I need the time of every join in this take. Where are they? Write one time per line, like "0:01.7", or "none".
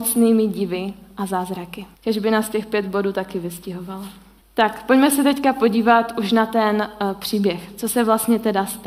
0:01.9
0:04.4